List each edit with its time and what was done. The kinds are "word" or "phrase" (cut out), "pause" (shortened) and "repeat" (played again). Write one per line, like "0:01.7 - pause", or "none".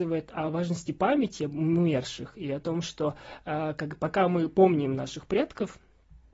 none